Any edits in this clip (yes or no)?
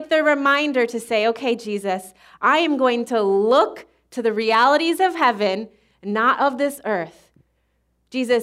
no